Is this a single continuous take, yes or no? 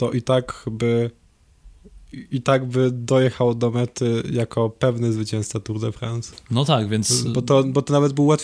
yes